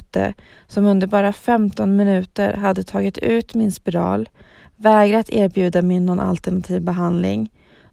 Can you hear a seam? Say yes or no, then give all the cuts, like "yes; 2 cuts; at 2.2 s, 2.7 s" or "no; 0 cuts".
no; 0 cuts